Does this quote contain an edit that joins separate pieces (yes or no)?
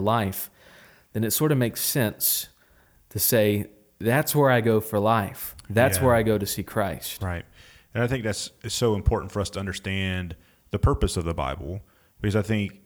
no